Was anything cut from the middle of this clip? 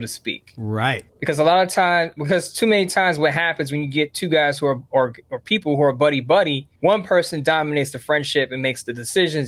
yes; 2 cuts; at 1.1 s, 6.8 s

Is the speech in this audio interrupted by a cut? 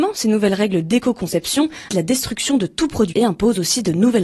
yes; 2 cuts; at 1.9 s, 3.1 s

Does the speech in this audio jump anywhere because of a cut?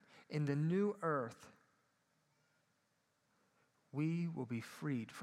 no; 0 cuts

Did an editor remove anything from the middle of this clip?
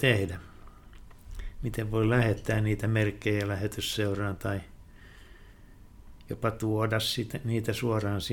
no; 0 cuts

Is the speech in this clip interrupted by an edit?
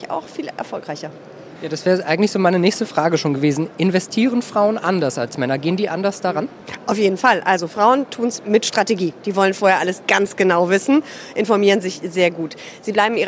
no; 0 cuts

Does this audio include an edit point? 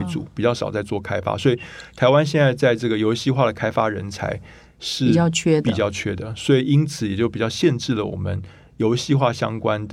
no; 0 cuts

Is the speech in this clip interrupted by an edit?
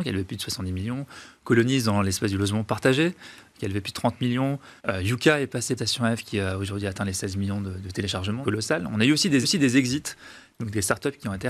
yes; 4 cuts; at 4.8 s, 5.8 s, 8.4 s, 9.4 s

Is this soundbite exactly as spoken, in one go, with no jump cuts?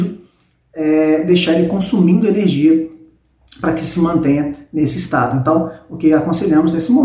yes; 0 cuts

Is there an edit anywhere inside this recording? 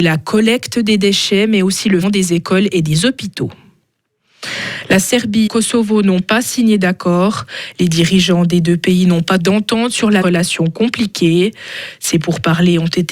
yes; 4 cuts; at 2.0 s, 5.5 s, 9.4 s, 10.2 s

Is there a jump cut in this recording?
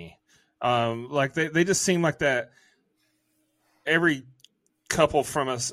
no; 0 cuts

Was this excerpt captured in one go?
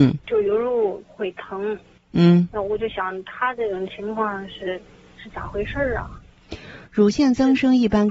yes; 0 cuts

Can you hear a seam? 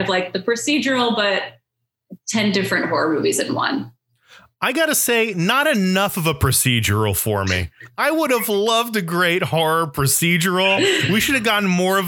no; 0 cuts

